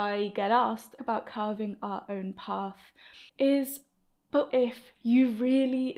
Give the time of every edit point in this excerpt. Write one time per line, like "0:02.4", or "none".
0:01.0
0:03.3
0:04.5
0:05.0